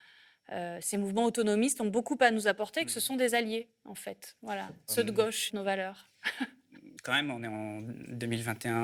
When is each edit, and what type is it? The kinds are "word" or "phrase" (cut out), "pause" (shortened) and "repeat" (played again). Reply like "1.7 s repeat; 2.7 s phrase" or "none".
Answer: 5.5 s phrase; 7.0 s pause